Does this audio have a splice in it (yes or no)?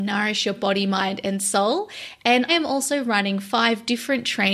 yes